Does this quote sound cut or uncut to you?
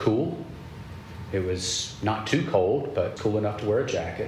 cut